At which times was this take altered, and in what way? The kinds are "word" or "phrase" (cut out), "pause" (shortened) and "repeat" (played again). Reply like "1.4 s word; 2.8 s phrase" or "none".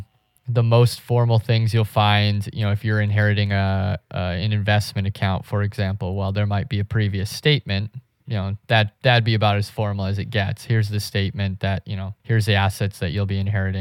12.2 s pause